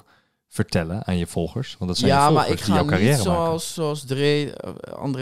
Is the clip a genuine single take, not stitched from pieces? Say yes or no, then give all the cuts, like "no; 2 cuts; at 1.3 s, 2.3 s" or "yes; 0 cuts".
yes; 0 cuts